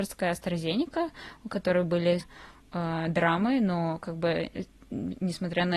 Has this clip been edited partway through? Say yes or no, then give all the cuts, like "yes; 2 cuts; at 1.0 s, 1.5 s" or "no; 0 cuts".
yes; 1 cut; at 2.2 s